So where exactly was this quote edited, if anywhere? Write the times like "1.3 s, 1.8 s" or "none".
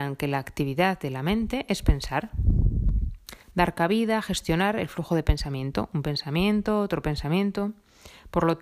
3.4 s